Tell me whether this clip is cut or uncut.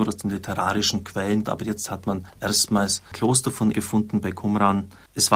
cut